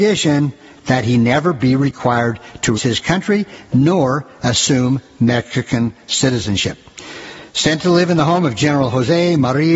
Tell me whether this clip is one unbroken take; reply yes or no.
no